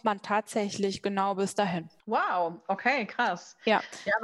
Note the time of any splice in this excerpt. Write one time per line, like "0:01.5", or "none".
0:02.0